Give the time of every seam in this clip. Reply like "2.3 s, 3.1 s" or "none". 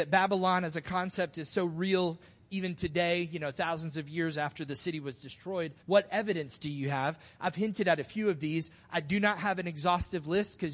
5.8 s